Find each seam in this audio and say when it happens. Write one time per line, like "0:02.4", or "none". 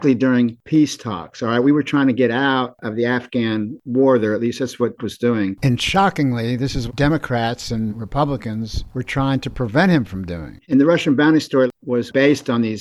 0:05.0
0:06.9
0:07.9
0:10.6

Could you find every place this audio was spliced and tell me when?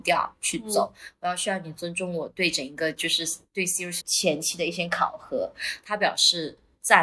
0:04.0

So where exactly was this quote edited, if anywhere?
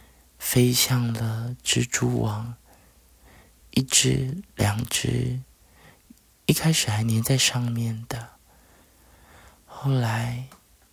none

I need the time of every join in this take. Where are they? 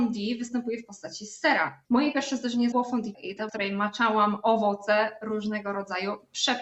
0:01.8
0:02.7
0:03.1
0:03.5

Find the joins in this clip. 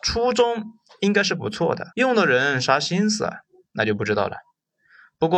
0:01.9

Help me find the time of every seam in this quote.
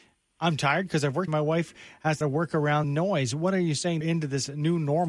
0:01.3
0:02.2
0:02.8
0:04.0

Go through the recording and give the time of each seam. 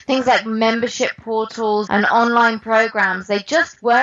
0:01.9

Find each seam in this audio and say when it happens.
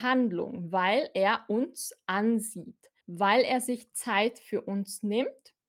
0:03.0

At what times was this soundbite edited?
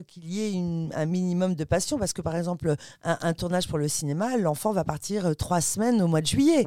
none

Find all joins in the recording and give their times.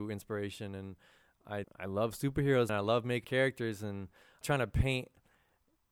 0:01.6
0:02.7
0:03.2
0:04.4

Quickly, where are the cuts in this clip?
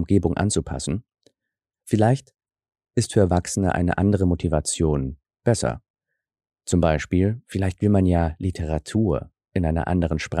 none

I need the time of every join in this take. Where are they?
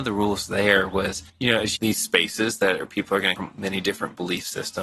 0:01.3
0:01.8
0:03.4

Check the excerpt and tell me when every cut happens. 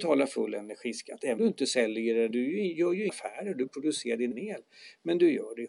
0:01.4
0:02.3
0:03.1
0:03.7
0:04.3

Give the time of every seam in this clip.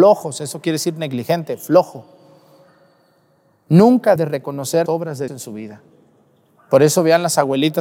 0:04.2
0:04.9
0:05.3

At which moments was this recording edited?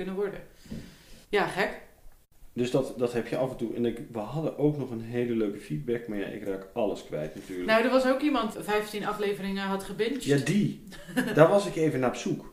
0:01.2
0:08.5

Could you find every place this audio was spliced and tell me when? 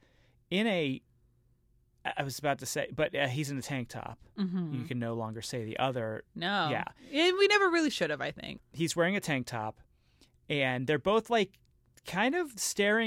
none

